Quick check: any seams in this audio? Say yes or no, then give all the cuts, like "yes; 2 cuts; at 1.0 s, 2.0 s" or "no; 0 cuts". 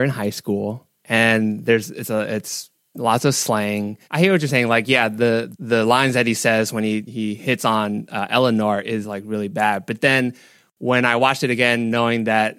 yes; 1 cut; at 4.0 s